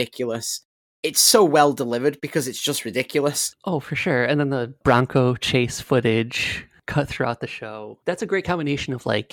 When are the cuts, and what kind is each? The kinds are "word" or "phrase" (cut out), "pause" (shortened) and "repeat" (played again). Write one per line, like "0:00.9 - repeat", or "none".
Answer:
0:08.0 - pause